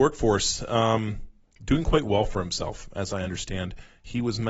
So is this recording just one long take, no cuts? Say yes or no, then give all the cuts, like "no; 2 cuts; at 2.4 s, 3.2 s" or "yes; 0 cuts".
yes; 0 cuts